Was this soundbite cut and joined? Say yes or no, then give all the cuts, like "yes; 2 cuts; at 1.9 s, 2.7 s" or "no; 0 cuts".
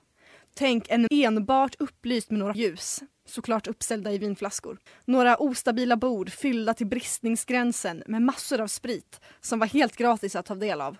yes; 3 cuts; at 1.1 s, 2.5 s, 4.9 s